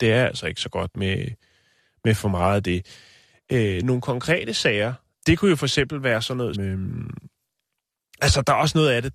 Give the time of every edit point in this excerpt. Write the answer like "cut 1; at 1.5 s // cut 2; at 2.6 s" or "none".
cut 1; at 0.9 s // cut 2; at 5.1 s // cut 3; at 6.5 s